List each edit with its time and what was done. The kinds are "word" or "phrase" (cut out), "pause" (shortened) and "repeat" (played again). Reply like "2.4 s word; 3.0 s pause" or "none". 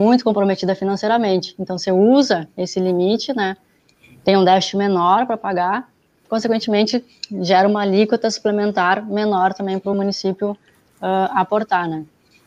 none